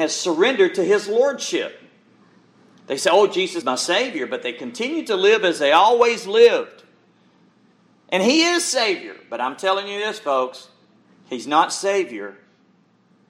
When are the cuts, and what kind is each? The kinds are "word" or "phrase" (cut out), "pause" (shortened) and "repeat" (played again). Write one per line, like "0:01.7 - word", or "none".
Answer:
0:03.6 - word